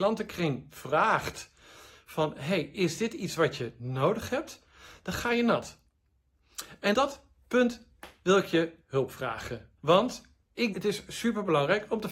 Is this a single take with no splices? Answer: no; 3 cuts; at 6.9 s, 9.8 s, 10.7 s

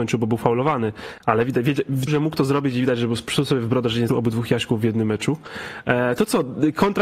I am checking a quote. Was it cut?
yes; 2 cuts; at 2.1 s, 4.1 s

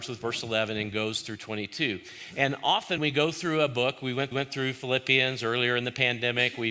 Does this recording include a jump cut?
yes; 2 cuts; at 3.0 s, 4.3 s

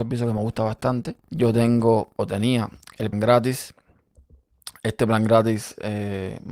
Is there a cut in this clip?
yes; 2 cuts; at 1.2 s, 3.1 s

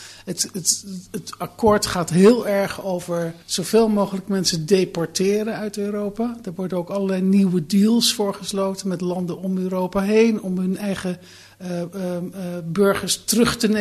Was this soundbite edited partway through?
yes; 1 cut; at 3.4 s

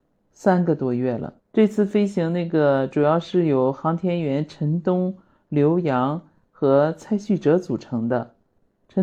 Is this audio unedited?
no; 1 cut; at 1.4 s

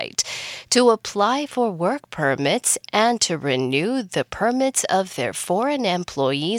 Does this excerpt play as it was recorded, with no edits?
yes; 0 cuts

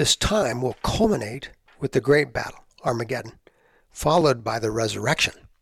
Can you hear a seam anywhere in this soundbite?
no; 0 cuts

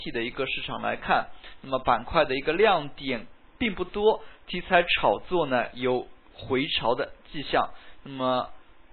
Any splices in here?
no; 0 cuts

